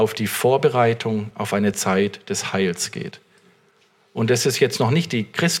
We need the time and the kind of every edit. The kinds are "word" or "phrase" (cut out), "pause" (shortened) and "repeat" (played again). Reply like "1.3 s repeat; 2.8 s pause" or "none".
none

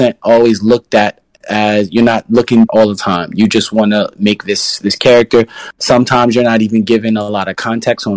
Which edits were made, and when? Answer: 2.7 s phrase

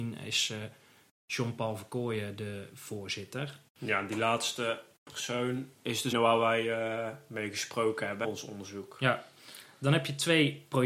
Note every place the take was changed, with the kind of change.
3.7 s pause; 6.1 s phrase; 8.2 s word

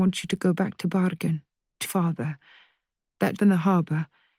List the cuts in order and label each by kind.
1.9 s word; 3.4 s word

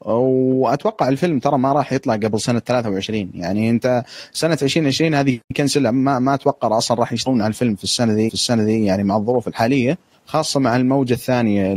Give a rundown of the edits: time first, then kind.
5.5 s pause; 8.3 s repeat

